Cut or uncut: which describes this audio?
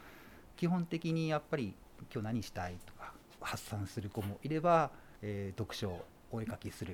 cut